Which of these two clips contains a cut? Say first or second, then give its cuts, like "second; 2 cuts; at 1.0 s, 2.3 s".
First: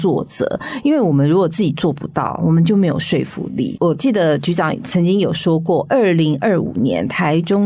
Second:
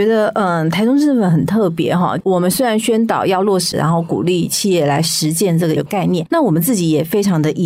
second; 2 cuts; at 3.7 s, 5.8 s